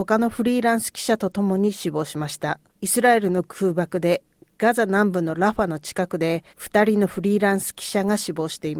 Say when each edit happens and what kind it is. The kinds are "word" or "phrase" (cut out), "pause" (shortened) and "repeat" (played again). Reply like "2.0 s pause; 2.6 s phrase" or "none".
2.7 s pause; 6.5 s pause